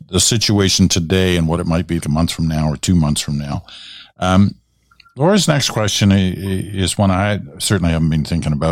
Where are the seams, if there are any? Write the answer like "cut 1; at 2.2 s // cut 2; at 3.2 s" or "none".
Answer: cut 1; at 2.0 s